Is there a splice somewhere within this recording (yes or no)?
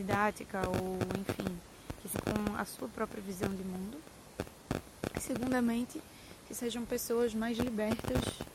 yes